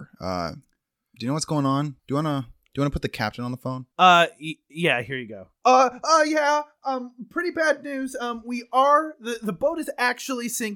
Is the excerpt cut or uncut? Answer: cut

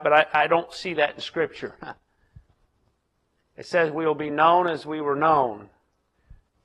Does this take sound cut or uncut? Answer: uncut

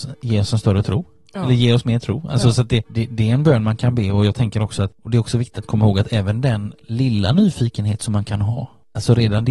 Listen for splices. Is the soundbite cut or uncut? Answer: uncut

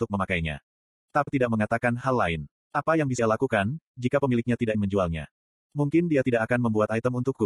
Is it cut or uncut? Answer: cut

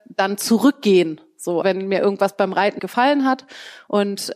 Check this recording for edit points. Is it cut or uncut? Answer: cut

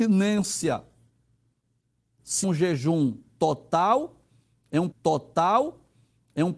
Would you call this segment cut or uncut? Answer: cut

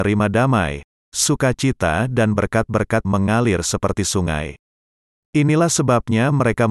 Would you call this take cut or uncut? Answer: cut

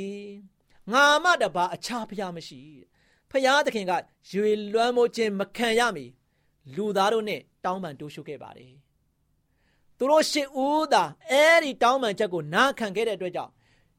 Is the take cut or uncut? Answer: uncut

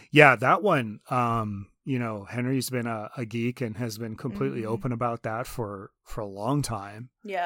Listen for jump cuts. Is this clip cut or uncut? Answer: uncut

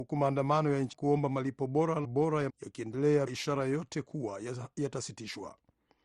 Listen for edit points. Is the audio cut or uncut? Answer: cut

